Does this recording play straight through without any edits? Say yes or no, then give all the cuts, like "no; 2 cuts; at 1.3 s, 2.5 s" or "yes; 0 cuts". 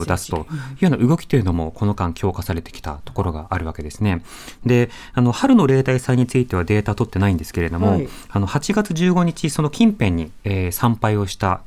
yes; 0 cuts